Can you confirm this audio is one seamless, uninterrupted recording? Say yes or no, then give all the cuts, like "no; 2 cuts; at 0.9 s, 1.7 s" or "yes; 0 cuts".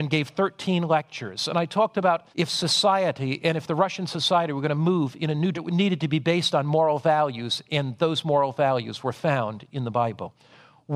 no; 2 cuts; at 2.3 s, 5.5 s